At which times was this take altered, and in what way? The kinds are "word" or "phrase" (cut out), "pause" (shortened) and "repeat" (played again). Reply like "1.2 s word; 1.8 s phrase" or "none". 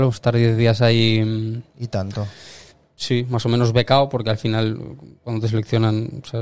none